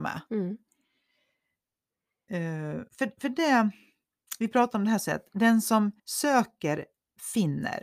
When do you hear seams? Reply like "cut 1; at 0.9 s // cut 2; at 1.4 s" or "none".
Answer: cut 1; at 2.9 s // cut 2; at 5.1 s // cut 3; at 6.0 s